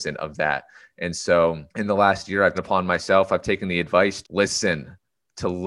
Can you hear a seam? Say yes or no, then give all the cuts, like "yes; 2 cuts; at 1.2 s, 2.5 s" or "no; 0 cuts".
yes; 3 cuts; at 1.7 s, 2.5 s, 4.2 s